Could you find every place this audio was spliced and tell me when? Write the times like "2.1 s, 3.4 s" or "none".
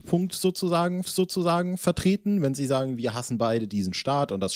1.0 s